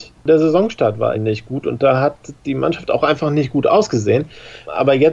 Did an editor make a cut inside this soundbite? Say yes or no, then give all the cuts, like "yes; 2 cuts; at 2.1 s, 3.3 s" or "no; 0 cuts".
yes; 1 cut; at 1.1 s